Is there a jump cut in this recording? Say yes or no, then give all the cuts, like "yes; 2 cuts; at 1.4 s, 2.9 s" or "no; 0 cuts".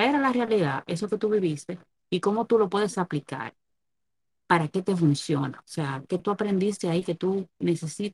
yes; 1 cut; at 6.1 s